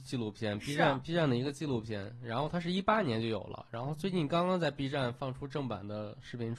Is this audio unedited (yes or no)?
yes